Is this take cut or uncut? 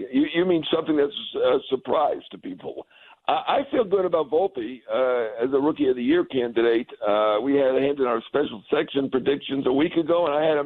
uncut